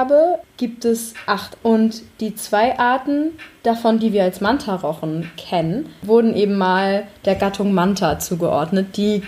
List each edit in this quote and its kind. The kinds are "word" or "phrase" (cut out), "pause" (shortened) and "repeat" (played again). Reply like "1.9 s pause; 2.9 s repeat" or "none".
1.6 s word